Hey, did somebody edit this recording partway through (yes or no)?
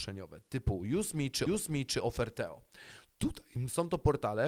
yes